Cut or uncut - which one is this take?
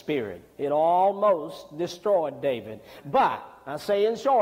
uncut